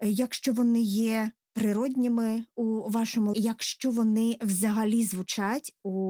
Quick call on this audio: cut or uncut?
cut